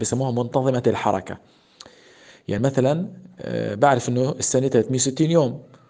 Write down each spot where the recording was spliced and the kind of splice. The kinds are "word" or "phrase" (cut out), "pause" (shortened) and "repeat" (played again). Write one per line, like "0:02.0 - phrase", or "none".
none